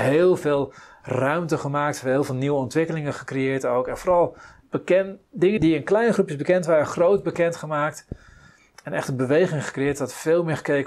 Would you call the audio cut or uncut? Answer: cut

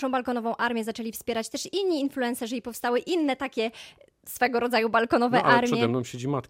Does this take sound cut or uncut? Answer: uncut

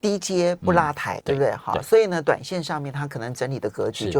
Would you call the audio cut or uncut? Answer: cut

